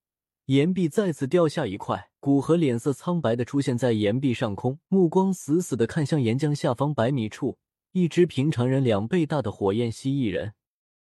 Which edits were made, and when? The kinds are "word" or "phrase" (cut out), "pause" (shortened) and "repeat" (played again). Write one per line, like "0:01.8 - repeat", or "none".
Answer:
0:02.2 - pause
0:04.8 - pause
0:07.7 - pause